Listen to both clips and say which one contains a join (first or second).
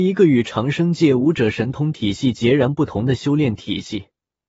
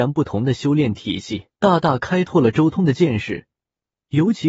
second